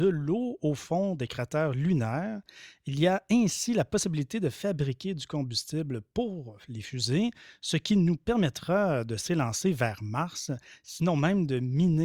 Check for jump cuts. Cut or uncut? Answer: uncut